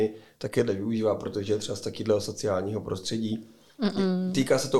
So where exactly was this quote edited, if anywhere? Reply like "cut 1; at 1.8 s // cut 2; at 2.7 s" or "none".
none